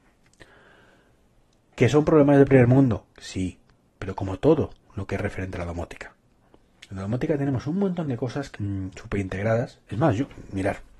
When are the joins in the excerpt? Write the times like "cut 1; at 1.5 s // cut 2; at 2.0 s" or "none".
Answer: cut 1; at 8.5 s